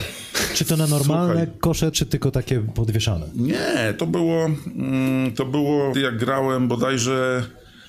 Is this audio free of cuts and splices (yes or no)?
no